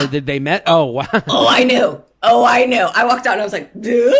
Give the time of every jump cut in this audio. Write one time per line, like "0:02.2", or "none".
none